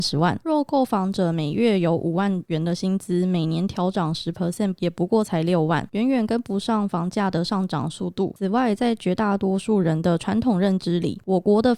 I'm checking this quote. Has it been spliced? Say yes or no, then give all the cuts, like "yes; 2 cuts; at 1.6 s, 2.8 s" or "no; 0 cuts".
no; 0 cuts